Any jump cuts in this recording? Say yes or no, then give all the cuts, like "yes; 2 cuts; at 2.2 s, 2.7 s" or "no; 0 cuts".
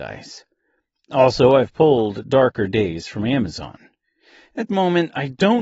yes; 1 cut; at 4.7 s